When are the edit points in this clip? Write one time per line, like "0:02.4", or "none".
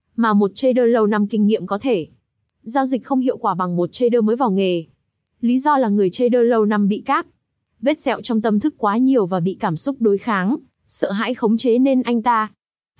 none